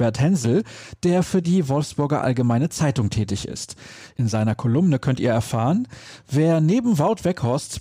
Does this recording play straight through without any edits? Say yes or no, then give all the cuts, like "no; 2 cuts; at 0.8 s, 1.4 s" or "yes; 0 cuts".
yes; 0 cuts